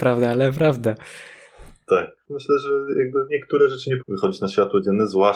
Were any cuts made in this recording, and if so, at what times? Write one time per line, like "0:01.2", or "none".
0:03.3
0:04.0